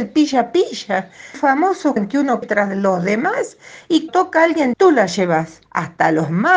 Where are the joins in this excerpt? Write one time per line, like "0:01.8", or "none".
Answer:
0:01.3
0:02.0
0:02.4
0:04.1
0:04.7
0:05.7